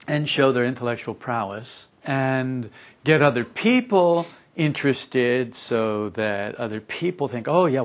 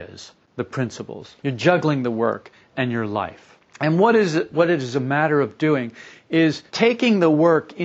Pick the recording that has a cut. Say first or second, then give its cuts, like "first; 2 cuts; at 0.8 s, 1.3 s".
second; 2 cuts; at 1.4 s, 6.7 s